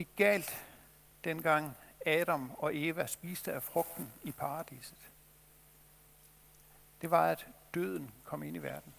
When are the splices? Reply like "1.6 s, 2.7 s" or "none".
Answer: none